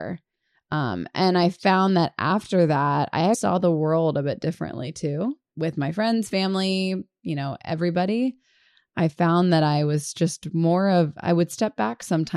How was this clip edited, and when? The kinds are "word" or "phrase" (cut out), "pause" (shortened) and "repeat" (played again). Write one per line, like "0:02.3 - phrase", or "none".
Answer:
0:03.3 - word
0:05.5 - word